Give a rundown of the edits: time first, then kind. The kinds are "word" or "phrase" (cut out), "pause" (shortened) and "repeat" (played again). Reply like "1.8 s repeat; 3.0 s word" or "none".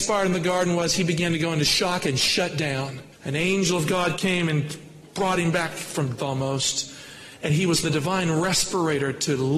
3.1 s pause; 6.2 s word; 7.8 s phrase

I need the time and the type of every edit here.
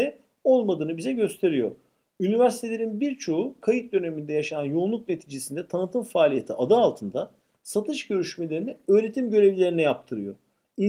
none

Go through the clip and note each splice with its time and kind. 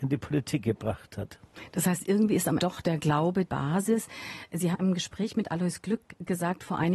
2.6 s word; 3.5 s word; 4.7 s word

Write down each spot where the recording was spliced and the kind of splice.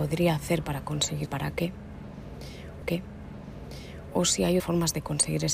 1.3 s word; 2.8 s repeat; 4.6 s word

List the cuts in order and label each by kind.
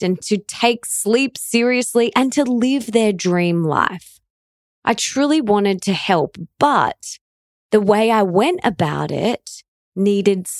none

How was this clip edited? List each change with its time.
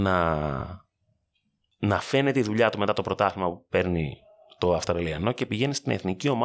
none

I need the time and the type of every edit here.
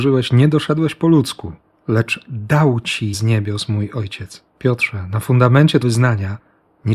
1.7 s pause; 3.1 s word; 4.5 s pause; 5.8 s word

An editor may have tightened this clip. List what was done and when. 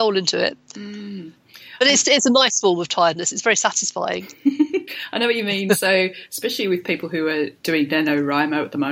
7.6 s pause

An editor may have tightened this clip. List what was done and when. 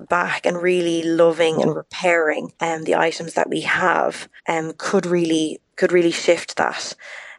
2.5 s pause; 4.4 s pause; 5.7 s pause

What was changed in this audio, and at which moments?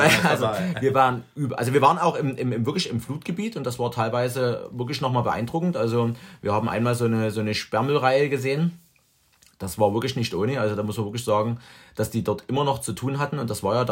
none

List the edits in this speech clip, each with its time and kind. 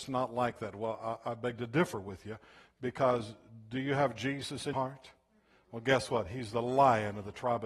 4.7 s word

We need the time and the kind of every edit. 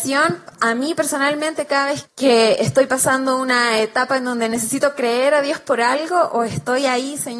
2.0 s word

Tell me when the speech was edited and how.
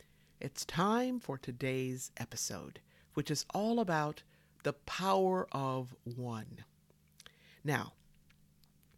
2.9 s pause

